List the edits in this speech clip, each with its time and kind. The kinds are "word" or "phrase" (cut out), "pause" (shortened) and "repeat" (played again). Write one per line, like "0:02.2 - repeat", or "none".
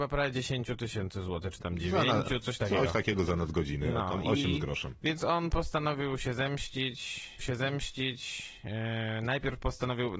0:07.4 - repeat